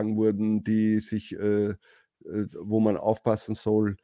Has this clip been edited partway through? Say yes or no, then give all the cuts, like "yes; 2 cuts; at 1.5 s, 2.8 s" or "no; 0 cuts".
no; 0 cuts